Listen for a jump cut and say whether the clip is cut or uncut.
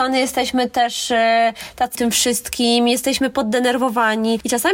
cut